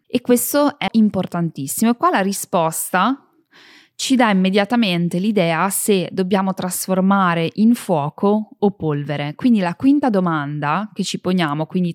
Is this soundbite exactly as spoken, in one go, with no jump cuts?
yes; 0 cuts

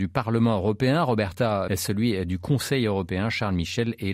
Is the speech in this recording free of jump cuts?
no; 1 cut; at 1.7 s

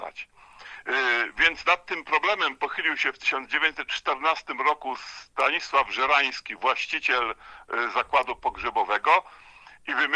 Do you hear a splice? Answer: no; 0 cuts

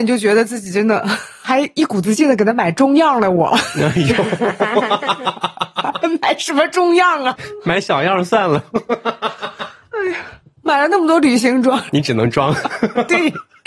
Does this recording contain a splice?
no; 0 cuts

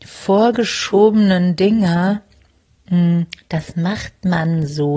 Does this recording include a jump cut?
no; 0 cuts

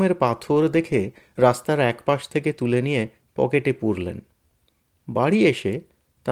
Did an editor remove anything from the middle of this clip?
no; 0 cuts

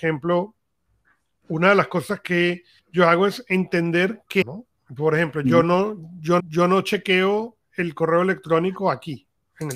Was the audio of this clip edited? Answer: yes; 3 cuts; at 2.8 s, 4.4 s, 6.4 s

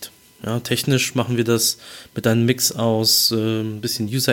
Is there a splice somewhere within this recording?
no; 0 cuts

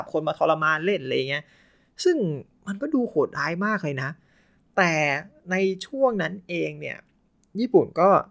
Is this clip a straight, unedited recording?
yes; 0 cuts

